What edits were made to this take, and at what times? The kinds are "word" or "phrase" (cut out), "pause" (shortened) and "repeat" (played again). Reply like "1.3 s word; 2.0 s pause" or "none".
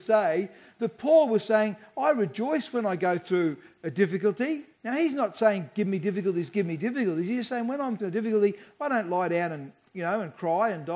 4.7 s pause; 8.0 s word